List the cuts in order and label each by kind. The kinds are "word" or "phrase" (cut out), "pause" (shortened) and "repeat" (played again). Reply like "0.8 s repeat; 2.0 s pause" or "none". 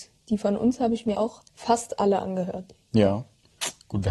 1.1 s word; 1.5 s pause